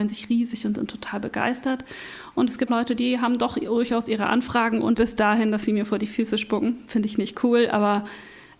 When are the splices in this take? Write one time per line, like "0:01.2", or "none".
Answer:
0:02.7
0:05.0